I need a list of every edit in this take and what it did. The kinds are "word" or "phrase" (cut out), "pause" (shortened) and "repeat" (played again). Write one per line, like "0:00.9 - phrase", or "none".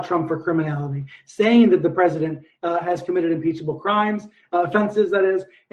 none